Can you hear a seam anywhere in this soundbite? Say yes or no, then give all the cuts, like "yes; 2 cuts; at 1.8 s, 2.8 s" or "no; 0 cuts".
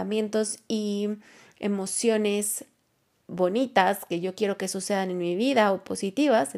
no; 0 cuts